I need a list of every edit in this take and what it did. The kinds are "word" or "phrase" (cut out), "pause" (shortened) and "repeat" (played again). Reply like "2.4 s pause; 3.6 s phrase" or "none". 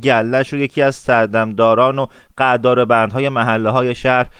none